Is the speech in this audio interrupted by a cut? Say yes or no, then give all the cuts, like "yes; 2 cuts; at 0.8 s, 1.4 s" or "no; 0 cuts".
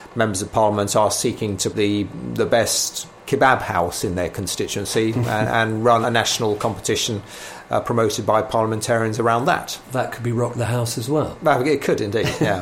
yes; 2 cuts; at 1.7 s, 6.0 s